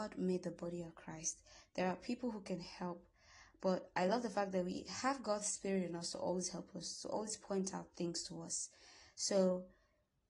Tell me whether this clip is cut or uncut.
uncut